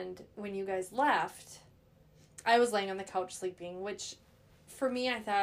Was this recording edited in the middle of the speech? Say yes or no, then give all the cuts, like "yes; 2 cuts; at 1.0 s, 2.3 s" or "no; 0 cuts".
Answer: no; 0 cuts